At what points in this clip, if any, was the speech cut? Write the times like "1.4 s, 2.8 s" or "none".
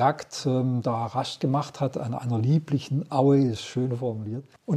none